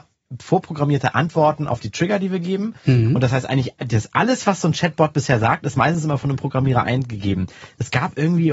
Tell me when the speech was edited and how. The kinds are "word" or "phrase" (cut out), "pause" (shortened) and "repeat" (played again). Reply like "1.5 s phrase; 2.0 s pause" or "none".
none